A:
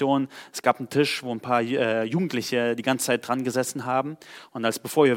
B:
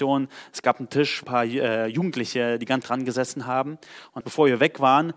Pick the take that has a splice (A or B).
B